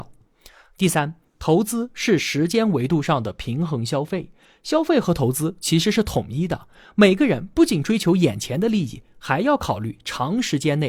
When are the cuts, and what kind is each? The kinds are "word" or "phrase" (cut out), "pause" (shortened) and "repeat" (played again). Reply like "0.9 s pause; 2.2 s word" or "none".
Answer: none